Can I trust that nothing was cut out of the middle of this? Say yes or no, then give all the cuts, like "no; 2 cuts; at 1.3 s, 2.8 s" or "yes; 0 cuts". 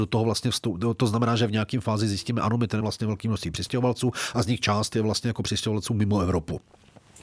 no; 1 cut; at 2.8 s